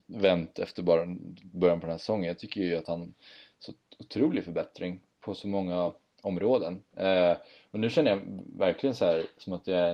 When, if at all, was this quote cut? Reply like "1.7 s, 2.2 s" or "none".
none